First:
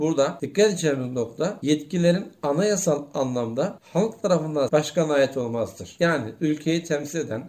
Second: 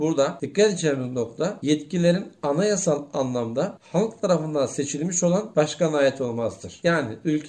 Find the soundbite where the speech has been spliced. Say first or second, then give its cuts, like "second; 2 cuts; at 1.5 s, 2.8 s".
first; 1 cut; at 4.7 s